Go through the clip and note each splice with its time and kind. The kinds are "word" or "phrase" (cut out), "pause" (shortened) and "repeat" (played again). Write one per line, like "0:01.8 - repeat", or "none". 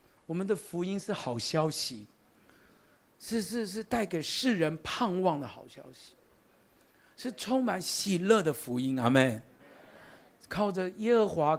none